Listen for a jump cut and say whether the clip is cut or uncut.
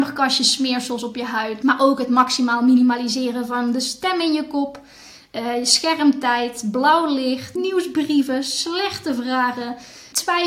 uncut